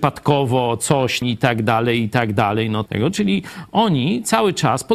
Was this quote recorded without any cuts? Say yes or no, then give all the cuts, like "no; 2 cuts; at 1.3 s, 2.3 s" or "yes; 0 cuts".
no; 2 cuts; at 1.2 s, 2.9 s